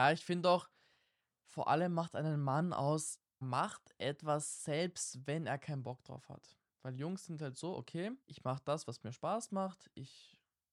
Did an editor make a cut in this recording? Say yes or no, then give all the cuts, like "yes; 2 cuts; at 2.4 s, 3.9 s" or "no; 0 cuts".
yes; 2 cuts; at 3.4 s, 8.2 s